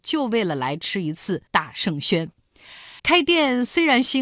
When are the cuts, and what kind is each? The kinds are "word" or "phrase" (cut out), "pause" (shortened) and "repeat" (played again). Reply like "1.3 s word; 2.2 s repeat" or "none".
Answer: 1.5 s pause; 3.0 s pause